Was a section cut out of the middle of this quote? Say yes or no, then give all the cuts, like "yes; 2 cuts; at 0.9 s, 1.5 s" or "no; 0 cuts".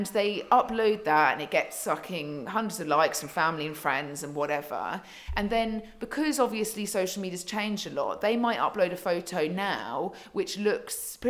no; 0 cuts